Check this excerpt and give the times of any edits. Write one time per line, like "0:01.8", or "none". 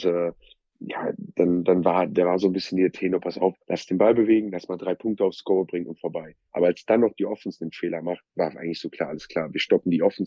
0:03.6
0:06.5